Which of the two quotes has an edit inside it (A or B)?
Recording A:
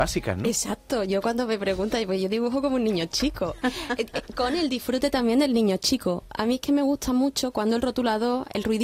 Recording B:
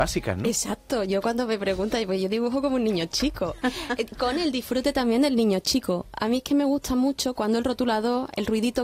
B